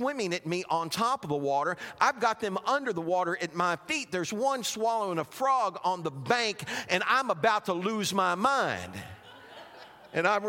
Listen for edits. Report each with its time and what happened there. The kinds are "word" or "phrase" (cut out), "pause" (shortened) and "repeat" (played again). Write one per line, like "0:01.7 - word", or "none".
none